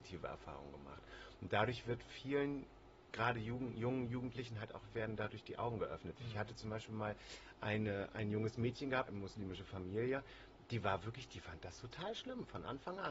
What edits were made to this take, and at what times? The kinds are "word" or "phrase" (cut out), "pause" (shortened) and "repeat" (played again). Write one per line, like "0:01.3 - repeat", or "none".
0:09.1 - word